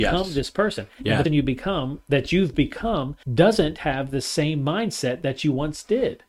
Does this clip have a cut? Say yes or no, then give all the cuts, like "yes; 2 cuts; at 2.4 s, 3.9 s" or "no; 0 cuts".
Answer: yes; 2 cuts; at 1.3 s, 3.2 s